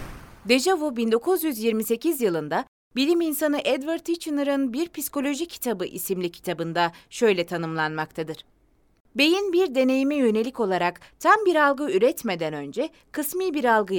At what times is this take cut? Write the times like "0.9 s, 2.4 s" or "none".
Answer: none